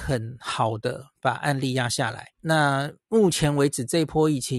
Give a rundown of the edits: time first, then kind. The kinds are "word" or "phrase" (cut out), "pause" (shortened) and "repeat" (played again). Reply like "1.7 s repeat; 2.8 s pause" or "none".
2.3 s pause